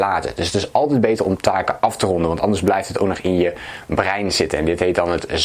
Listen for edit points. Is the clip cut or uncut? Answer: uncut